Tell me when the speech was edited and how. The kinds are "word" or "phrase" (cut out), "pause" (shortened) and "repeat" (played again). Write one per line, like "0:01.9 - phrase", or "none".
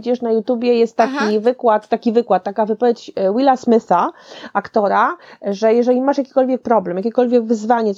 none